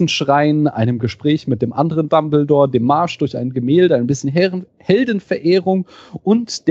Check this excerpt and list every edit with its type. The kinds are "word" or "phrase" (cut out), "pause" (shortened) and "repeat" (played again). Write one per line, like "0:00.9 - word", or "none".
none